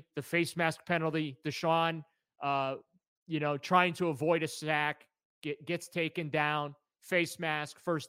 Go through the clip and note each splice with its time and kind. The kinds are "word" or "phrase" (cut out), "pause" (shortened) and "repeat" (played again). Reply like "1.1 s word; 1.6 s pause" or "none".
none